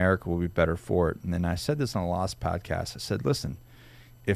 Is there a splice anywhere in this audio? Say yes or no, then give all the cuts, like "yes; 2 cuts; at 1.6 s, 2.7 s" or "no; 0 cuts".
no; 0 cuts